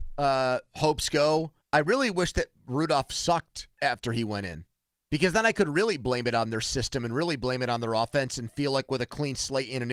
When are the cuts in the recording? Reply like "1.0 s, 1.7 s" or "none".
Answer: 1.6 s, 3.7 s, 4.9 s